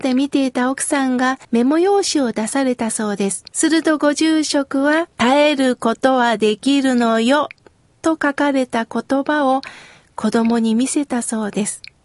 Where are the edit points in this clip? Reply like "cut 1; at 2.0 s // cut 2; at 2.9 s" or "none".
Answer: cut 1; at 1.4 s // cut 2; at 3.5 s // cut 3; at 5.1 s // cut 4; at 7.7 s